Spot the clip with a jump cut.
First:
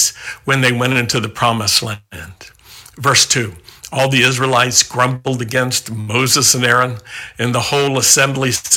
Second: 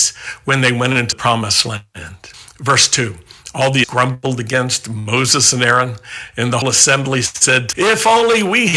second; 5 cuts; at 1.1 s, 2.3 s, 3.8 s, 6.6 s, 7.7 s

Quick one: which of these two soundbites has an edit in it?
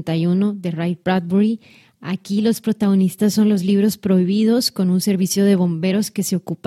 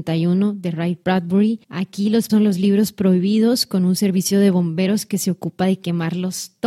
second; 2 cuts; at 1.6 s, 2.3 s

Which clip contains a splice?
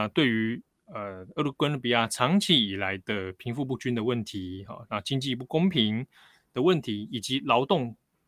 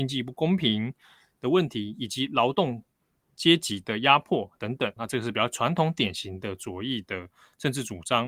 second; 1 cut; at 5.0 s

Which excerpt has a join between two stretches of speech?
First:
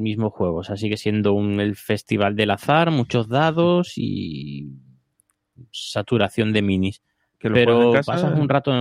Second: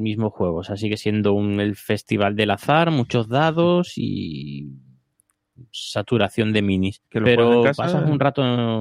second; 1 cut; at 7.1 s

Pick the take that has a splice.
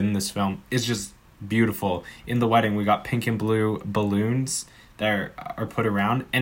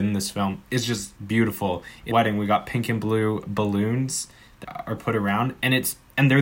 second; 3 cuts; at 1.2 s, 2.1 s, 4.6 s

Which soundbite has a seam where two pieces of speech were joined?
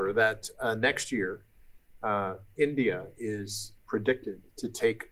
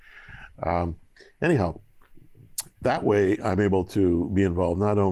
second; 1 cut; at 2.8 s

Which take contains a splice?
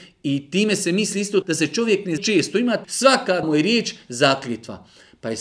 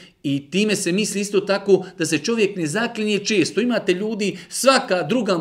first; 4 cuts; at 1.4 s, 2.2 s, 2.8 s, 3.4 s

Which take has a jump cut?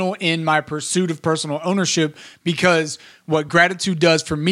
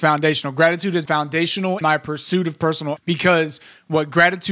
second; 3 cuts; at 1.1 s, 1.8 s, 3.0 s

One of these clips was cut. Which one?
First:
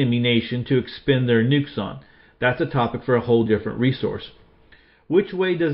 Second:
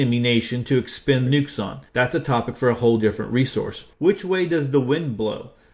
second; 3 cuts; at 1.3 s, 1.9 s, 3.9 s

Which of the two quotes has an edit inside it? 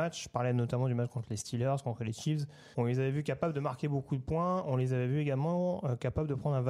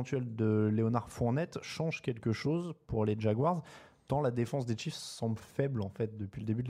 first; 1 cut; at 2.7 s

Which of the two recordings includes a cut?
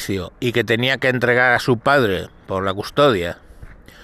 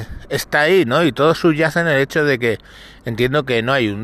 first; 1 cut; at 1.6 s

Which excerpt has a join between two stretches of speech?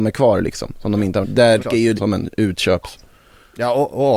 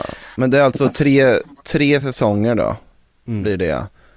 first; 3 cuts; at 1.2 s, 1.6 s, 2.0 s

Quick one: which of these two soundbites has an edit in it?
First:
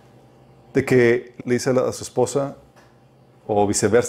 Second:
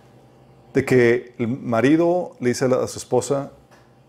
first; 1 cut; at 1.4 s

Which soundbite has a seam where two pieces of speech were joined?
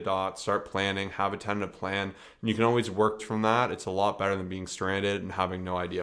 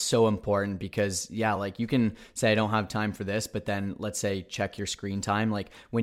first; 1 cut; at 3.2 s

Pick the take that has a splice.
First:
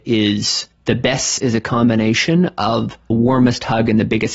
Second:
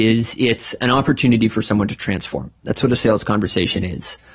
first; 2 cuts; at 1.4 s, 3.1 s

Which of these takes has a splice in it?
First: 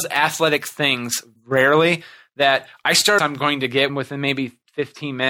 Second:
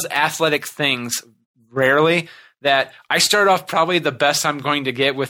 first; 3 cuts; at 1.4 s, 3.2 s, 3.9 s

